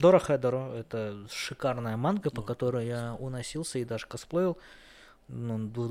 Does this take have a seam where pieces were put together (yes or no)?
no